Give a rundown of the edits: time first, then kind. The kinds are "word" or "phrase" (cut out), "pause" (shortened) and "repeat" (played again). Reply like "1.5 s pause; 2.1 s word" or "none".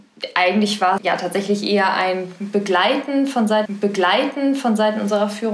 1.0 s word; 3.6 s repeat